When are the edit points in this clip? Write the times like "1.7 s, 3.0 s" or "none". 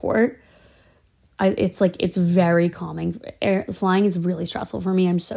none

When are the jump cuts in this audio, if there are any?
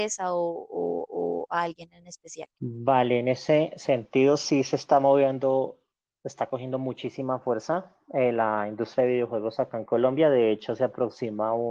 1.1 s, 2.5 s

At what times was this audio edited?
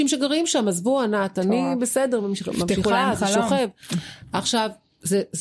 none

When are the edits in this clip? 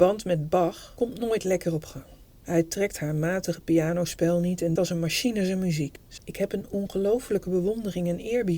4.8 s, 6.2 s

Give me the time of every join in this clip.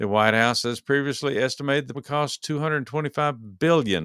1.9 s

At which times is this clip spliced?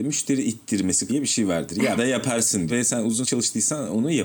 1.1 s, 2.0 s, 2.7 s, 3.2 s

